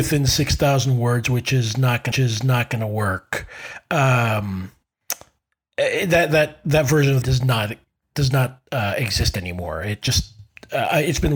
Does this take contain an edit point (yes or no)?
yes